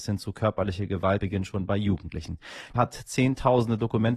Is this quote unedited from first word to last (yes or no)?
no